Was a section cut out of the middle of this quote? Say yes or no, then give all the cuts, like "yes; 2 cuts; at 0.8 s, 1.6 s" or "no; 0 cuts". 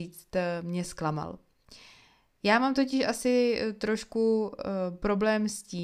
no; 0 cuts